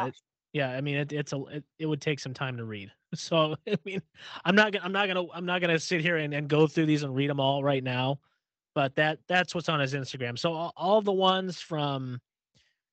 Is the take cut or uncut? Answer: uncut